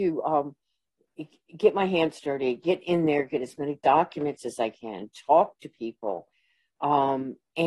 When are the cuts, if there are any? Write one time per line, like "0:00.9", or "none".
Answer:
none